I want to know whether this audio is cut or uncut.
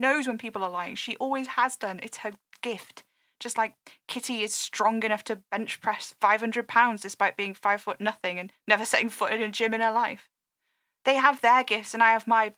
uncut